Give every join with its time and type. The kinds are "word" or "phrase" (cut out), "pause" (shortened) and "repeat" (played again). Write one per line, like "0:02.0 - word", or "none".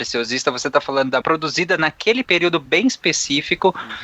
0:01.2 - phrase
0:02.2 - phrase